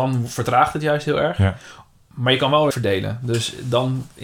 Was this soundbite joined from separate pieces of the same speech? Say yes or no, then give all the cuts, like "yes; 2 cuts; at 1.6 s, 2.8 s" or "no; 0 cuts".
yes; 1 cut; at 2.7 s